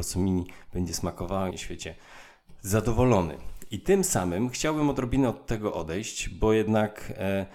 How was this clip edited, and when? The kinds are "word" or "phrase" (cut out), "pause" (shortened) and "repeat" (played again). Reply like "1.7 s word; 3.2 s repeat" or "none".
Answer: 1.5 s phrase